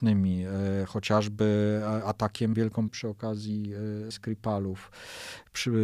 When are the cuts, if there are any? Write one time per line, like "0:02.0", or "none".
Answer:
0:02.5
0:02.9
0:04.1